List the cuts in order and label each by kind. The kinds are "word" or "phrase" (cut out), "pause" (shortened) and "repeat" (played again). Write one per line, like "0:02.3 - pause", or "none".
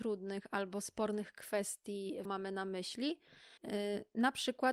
0:02.2 - phrase
0:03.6 - pause